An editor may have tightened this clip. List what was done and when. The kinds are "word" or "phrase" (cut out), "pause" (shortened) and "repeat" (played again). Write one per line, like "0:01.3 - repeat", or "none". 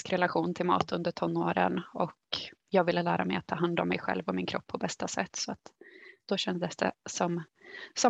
none